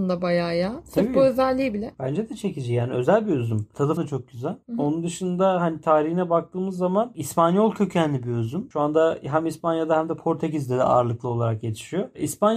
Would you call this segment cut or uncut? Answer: cut